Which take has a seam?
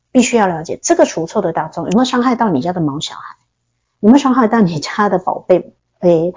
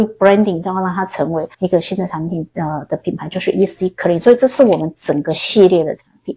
second; 1 cut; at 1.5 s

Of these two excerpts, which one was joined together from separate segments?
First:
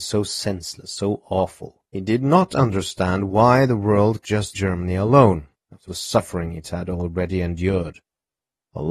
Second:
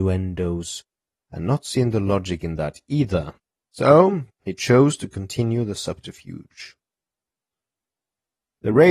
first; 4 cuts; at 1.8 s, 4.2 s, 4.5 s, 5.9 s

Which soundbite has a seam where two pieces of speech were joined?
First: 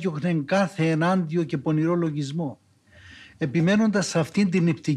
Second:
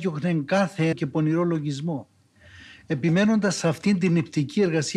second; 1 cut; at 0.9 s

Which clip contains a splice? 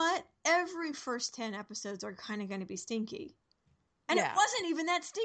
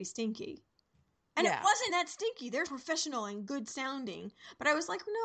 second; 2 cuts; at 1.9 s, 2.7 s

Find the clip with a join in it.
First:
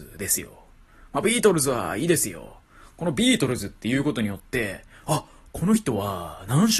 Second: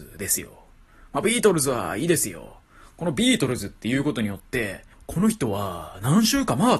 second; 1 cut; at 4.9 s

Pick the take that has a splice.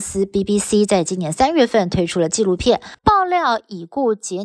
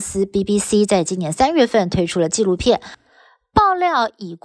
first; 1 cut; at 3.0 s

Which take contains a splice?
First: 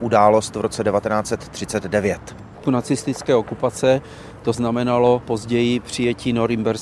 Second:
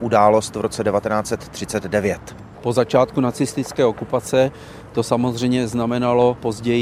first; 2 cuts; at 2.6 s, 4.5 s

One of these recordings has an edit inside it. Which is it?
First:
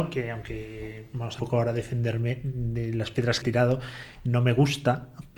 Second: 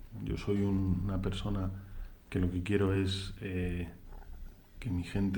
first; 2 cuts; at 1.4 s, 3.4 s

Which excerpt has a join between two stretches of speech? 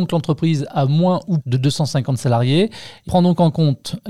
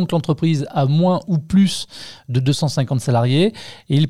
first; 2 cuts; at 1.4 s, 3.1 s

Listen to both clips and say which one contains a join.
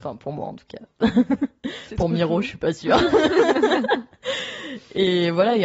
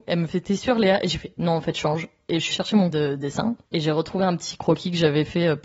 second; 3 cuts; at 2.5 s, 2.9 s, 3.6 s

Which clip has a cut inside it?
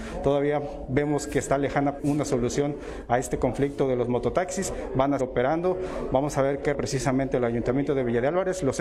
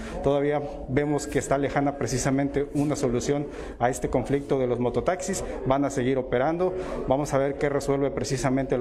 first; 3 cuts; at 2.0 s, 5.2 s, 6.7 s

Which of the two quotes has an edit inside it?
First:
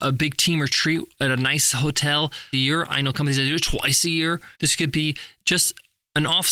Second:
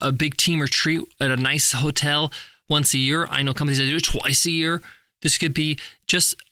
first; 2 cuts; at 2.5 s, 4.5 s

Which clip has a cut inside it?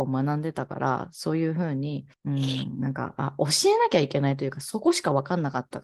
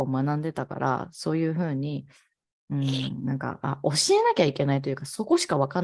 first; 1 cut; at 2.1 s

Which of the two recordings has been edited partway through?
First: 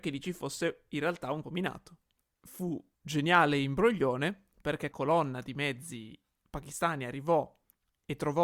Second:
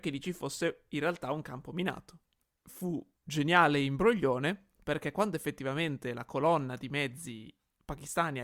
first; 2 cuts; at 1.4 s, 4.9 s

